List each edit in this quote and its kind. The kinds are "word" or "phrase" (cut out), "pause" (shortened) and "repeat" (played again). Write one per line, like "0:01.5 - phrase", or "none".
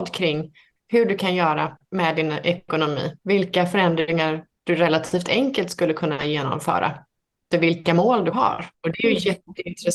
0:01.8 - pause
0:03.2 - pause
0:07.5 - word
0:08.3 - word
0:08.7 - pause